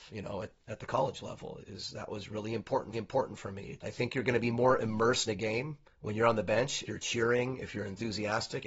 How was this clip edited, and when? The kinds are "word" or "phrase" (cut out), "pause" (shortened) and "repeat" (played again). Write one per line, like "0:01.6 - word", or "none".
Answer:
0:01.6 - word
0:02.9 - repeat
0:03.8 - word
0:05.3 - word
0:05.9 - pause
0:06.9 - word